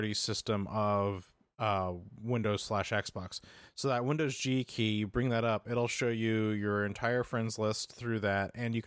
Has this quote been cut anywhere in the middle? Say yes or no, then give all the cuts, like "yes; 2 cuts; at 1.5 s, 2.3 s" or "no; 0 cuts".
no; 0 cuts